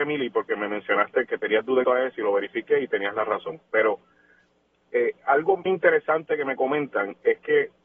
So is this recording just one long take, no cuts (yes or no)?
no